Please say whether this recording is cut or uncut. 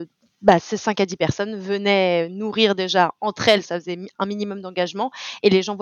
uncut